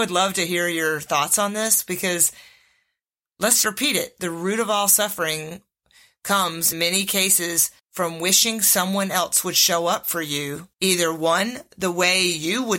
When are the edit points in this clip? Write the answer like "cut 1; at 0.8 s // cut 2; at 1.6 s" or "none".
cut 1; at 3.6 s // cut 2; at 6.7 s // cut 3; at 7.8 s // cut 4; at 10.7 s